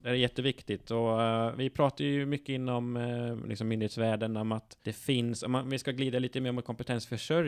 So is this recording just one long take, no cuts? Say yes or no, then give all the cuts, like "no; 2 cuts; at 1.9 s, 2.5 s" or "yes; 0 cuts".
no; 1 cut; at 4.8 s